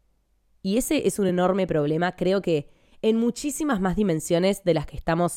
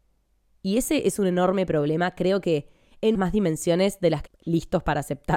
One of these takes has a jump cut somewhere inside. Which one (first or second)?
second